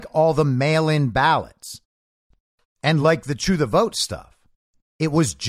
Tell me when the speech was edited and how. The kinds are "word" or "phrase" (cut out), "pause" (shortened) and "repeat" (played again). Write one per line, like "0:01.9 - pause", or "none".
none